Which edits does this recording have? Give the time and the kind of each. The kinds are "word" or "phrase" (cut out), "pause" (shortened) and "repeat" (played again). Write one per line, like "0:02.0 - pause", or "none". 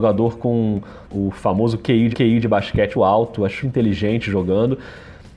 0:01.0 - pause
0:02.1 - repeat
0:02.9 - word
0:03.6 - phrase